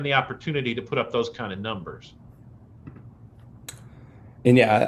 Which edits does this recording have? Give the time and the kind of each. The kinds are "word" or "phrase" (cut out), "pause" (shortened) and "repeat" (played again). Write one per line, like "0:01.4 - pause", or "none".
none